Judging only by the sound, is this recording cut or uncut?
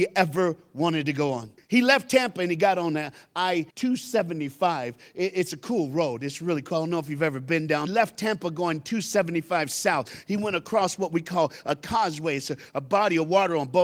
cut